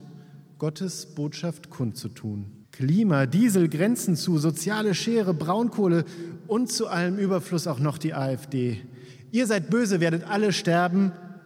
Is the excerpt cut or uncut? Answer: cut